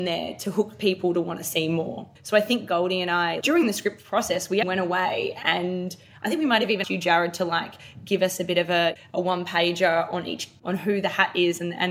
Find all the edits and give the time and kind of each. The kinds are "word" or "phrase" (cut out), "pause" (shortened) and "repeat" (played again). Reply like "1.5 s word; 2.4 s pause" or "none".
2.2 s pause; 3.4 s word; 4.6 s word; 6.8 s word